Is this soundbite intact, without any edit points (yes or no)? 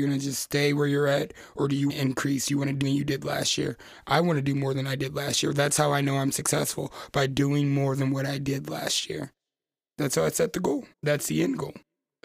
no